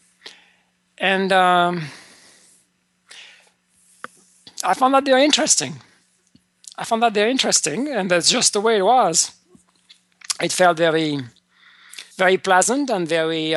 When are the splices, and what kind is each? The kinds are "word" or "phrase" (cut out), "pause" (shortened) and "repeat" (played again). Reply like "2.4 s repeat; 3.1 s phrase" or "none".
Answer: 12.1 s pause